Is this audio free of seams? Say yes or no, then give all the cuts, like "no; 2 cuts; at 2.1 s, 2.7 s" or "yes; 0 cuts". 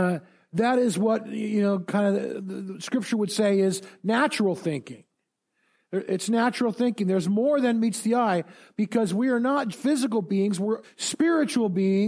no; 2 cuts; at 9.7 s, 10.8 s